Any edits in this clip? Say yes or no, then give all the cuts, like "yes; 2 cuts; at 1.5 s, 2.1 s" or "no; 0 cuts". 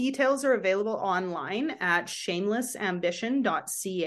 no; 0 cuts